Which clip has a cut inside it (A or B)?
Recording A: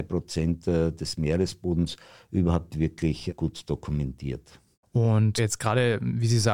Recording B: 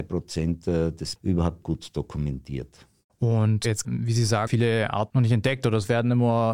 B